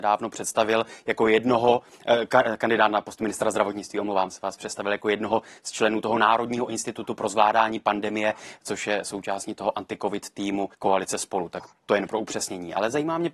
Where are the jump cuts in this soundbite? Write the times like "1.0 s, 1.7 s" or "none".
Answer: 10.7 s

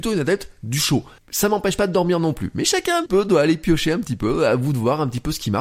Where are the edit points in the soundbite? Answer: 1.2 s, 3.1 s

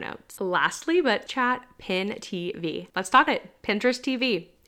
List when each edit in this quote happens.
1.3 s, 2.9 s, 3.3 s

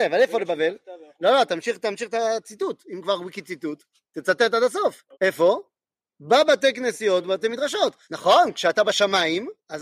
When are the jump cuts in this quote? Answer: 3.9 s, 5.1 s, 8.0 s

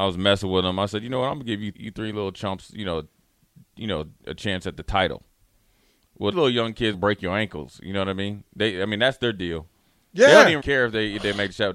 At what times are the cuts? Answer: 1.7 s, 6.3 s, 6.9 s, 10.6 s

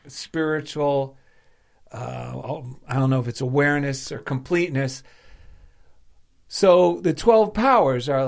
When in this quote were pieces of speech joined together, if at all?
none

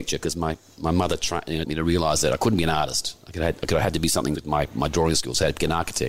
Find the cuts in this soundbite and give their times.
1.6 s, 4.3 s

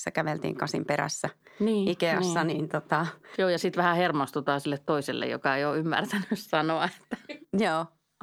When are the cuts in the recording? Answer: none

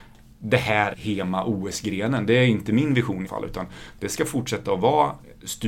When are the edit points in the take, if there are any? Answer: 0.9 s, 3.3 s

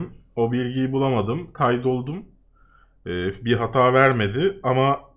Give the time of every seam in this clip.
none

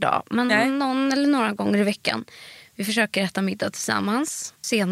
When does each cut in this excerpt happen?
none

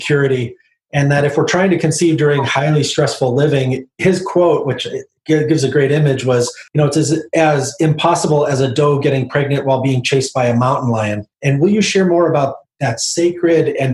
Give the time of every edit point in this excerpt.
6.7 s, 11.3 s

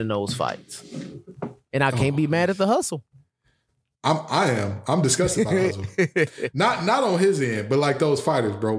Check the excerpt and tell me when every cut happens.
none

